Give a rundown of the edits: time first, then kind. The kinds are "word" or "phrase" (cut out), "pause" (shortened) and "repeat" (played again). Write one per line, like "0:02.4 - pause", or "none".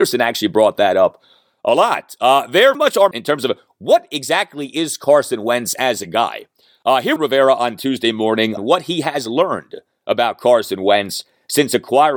0:02.7 - word
0:03.1 - phrase
0:07.2 - phrase
0:08.6 - word